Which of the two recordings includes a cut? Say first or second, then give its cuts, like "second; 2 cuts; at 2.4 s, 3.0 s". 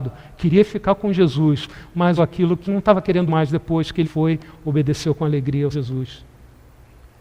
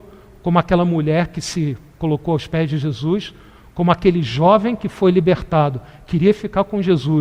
first; 5 cuts; at 2.2 s, 2.7 s, 3.3 s, 4.0 s, 5.7 s